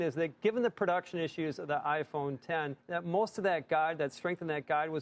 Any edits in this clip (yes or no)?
yes